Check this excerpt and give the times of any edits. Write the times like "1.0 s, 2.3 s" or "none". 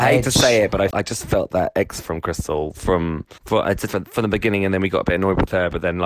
0.9 s, 2.0 s, 3.4 s, 3.9 s

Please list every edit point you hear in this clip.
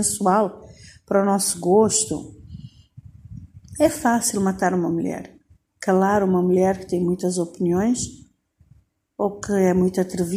none

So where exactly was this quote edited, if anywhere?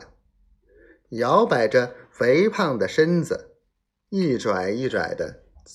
none

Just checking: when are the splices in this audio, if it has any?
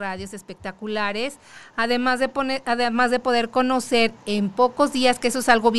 none

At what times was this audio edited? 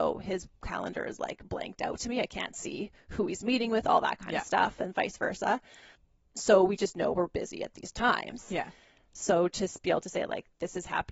none

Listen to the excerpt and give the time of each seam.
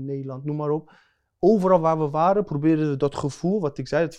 none

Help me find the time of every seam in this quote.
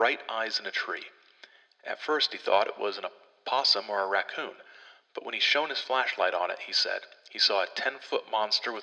none

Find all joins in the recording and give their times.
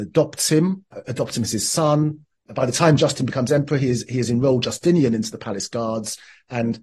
none

